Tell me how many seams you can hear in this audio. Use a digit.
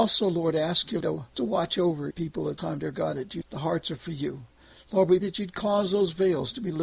6